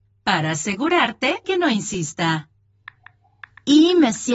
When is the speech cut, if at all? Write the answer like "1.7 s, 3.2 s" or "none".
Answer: 1.4 s